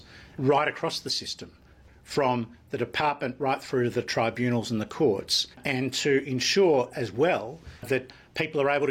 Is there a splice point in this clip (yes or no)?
yes